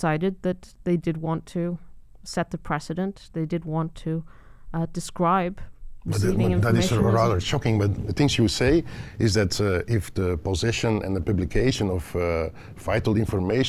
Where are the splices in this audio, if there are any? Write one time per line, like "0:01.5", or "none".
none